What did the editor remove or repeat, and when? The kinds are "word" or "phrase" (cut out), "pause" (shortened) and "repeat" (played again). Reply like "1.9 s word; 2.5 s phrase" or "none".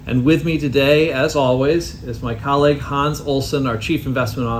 none